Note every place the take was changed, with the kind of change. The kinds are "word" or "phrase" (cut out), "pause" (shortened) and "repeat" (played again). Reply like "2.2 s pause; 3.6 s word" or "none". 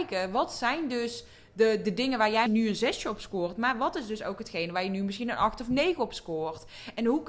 2.5 s word